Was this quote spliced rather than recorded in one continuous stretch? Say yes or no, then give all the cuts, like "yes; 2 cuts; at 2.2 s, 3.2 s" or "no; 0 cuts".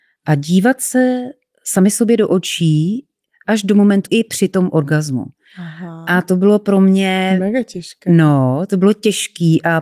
yes; 1 cut; at 4.1 s